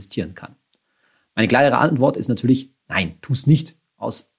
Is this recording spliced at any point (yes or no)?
no